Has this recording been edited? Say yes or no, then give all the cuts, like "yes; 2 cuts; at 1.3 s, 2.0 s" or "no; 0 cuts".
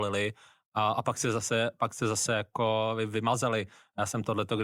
no; 0 cuts